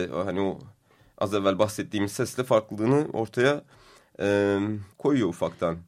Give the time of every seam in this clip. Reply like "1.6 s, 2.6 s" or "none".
4.9 s